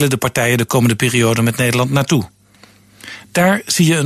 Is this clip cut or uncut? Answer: uncut